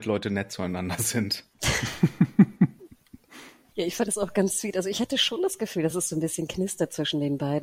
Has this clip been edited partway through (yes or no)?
no